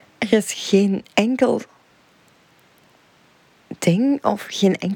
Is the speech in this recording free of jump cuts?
no; 1 cut; at 1.1 s

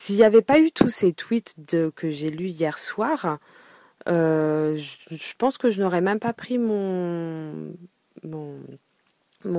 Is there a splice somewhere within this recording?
no; 0 cuts

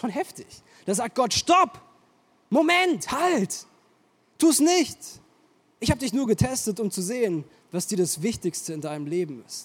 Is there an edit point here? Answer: no; 0 cuts

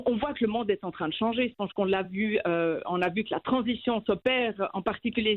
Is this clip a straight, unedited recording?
yes; 0 cuts

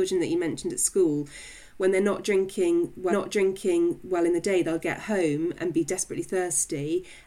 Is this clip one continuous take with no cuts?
no; 2 cuts; at 3.1 s, 4.8 s

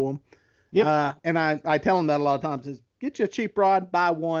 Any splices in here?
yes; 1 cut; at 1.2 s

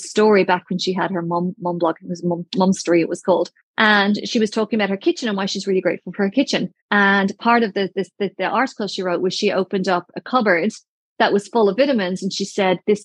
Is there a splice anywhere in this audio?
yes; 2 cuts; at 3.6 s, 6.8 s

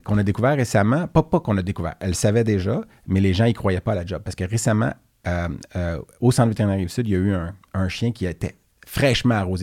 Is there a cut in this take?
no; 0 cuts

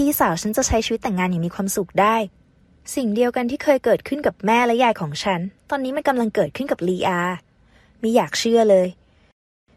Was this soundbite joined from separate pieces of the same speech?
no; 0 cuts

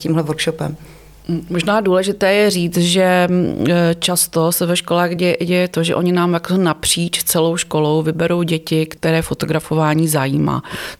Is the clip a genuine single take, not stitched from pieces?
yes; 0 cuts

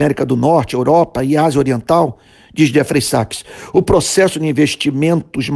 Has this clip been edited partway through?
no; 0 cuts

